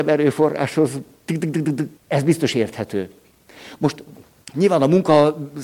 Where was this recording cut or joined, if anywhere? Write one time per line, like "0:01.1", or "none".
0:02.0
0:04.2